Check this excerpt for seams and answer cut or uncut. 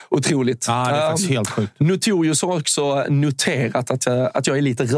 uncut